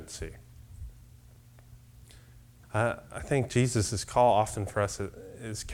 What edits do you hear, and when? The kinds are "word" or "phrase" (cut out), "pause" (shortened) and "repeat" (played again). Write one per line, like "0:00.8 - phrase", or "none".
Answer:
0:02.6 - word